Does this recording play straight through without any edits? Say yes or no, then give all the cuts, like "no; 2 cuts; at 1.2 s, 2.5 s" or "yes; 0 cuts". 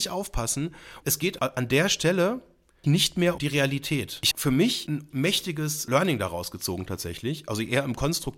no; 6 cuts; at 1.0 s, 1.4 s, 2.8 s, 3.4 s, 4.3 s, 5.1 s